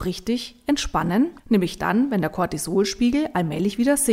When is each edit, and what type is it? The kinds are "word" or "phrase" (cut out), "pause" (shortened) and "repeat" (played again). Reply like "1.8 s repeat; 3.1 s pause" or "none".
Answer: 1.4 s pause